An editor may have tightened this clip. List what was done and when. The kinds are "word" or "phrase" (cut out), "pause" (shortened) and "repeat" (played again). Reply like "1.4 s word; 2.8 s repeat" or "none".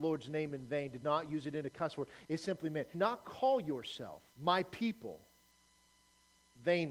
1.0 s phrase; 2.9 s word; 4.3 s pause